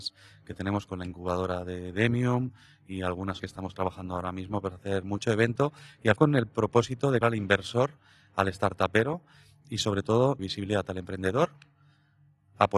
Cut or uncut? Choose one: cut